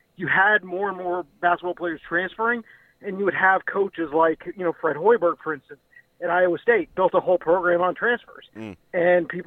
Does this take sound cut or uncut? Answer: uncut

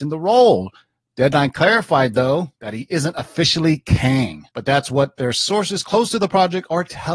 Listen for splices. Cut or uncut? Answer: cut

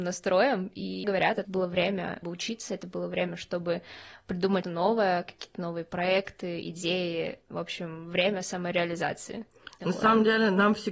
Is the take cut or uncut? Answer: cut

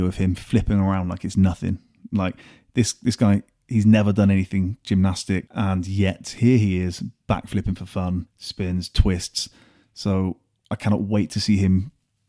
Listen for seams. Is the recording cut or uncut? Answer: uncut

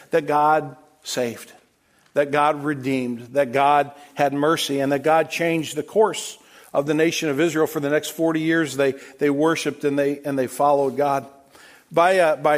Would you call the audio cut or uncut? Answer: uncut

